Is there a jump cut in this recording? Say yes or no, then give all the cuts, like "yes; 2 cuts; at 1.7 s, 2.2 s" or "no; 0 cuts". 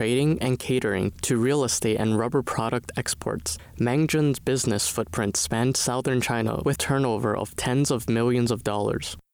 yes; 1 cut; at 6.8 s